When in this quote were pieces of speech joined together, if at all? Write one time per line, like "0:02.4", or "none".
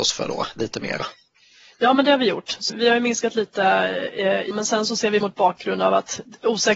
0:02.7
0:04.5
0:05.2